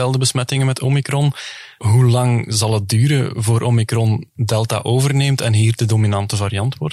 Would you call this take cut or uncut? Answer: uncut